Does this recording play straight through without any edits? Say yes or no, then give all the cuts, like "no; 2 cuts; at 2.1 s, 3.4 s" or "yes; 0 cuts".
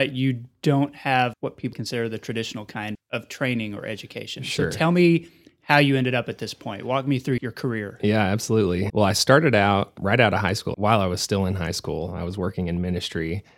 no; 6 cuts; at 1.3 s, 1.7 s, 2.9 s, 7.4 s, 8.9 s, 10.7 s